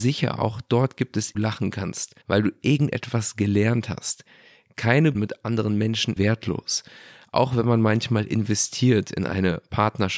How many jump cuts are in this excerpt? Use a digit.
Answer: 4